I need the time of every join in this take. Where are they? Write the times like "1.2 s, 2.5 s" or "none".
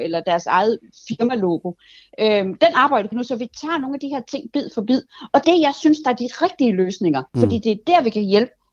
3.1 s, 5.4 s, 7.3 s